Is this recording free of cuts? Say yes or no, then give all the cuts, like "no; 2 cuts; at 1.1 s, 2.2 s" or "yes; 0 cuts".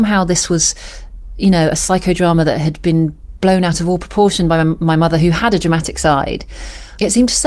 yes; 0 cuts